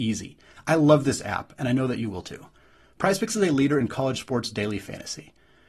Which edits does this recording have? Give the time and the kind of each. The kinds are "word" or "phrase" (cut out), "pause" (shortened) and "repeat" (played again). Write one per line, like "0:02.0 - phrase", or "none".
none